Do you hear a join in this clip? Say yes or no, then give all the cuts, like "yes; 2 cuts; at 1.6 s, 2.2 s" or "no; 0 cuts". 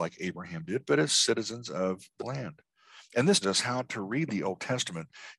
yes; 2 cuts; at 2.2 s, 3.4 s